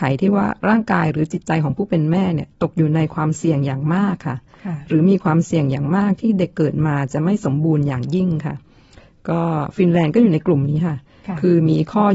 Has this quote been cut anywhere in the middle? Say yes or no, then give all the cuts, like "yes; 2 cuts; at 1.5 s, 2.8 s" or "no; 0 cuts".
no; 0 cuts